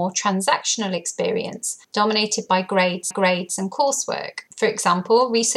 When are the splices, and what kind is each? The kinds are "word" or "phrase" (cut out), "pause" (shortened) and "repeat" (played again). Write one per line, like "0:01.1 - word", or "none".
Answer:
0:01.8 - pause
0:03.1 - repeat
0:04.5 - pause